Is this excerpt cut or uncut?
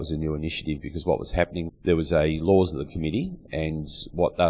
cut